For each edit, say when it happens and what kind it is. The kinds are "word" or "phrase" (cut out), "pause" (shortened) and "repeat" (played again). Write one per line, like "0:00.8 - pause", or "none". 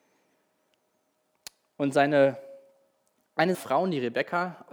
0:03.5 - word